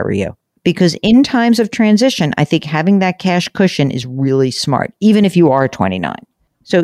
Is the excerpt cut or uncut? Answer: uncut